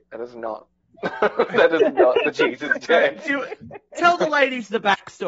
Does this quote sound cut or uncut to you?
uncut